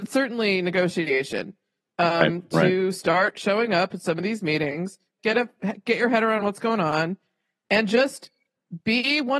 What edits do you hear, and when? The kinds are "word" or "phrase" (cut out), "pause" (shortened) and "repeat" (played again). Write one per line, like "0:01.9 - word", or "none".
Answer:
0:05.2 - word